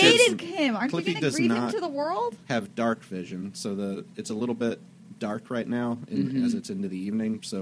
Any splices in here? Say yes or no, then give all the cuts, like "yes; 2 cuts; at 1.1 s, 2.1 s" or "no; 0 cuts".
no; 0 cuts